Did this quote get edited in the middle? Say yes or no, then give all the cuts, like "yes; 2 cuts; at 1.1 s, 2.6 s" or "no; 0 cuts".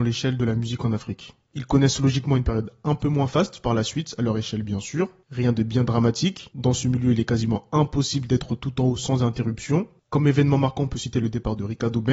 no; 0 cuts